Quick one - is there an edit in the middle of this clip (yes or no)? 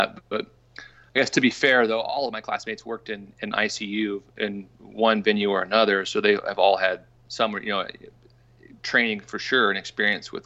no